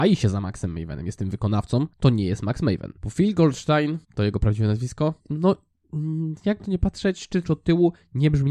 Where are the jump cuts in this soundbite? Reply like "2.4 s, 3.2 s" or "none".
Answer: 1.9 s, 3.0 s, 4.0 s, 5.2 s, 6.6 s, 7.4 s